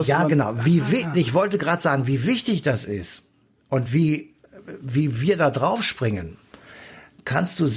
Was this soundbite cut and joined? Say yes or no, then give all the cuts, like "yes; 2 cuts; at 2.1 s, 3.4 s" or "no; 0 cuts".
no; 0 cuts